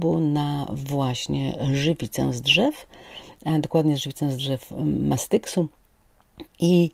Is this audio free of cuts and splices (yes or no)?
yes